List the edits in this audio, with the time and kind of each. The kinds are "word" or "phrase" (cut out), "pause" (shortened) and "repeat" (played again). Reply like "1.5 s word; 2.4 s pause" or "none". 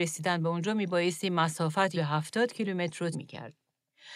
1.9 s word; 3.1 s word